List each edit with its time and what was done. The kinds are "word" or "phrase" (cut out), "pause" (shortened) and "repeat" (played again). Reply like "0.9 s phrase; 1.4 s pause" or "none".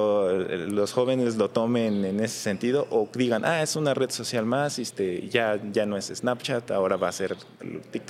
none